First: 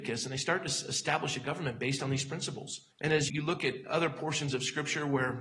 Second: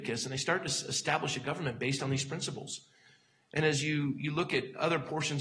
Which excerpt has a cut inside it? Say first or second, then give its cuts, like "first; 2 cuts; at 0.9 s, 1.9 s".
first; 2 cuts; at 2.9 s, 3.3 s